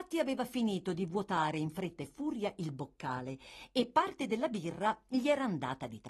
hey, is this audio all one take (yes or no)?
yes